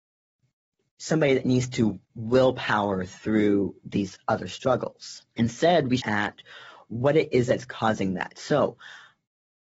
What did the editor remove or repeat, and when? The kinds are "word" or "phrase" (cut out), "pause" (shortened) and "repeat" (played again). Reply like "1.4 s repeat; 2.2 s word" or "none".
2.0 s pause; 5.3 s pause; 6.0 s phrase